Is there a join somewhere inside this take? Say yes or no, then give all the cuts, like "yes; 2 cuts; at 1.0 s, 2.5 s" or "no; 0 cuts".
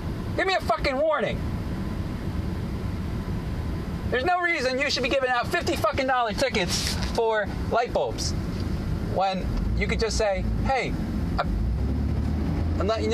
no; 0 cuts